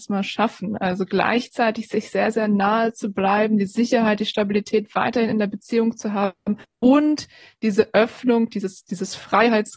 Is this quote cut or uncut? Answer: uncut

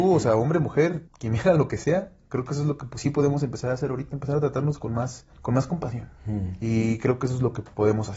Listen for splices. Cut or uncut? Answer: cut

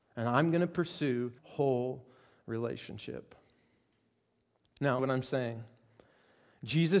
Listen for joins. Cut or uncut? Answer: cut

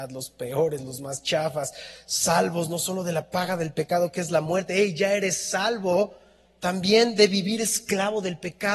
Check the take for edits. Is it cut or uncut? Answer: uncut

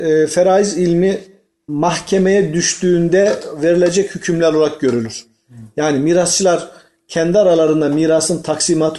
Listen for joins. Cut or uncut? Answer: uncut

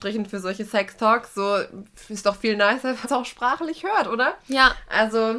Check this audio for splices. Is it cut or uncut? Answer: cut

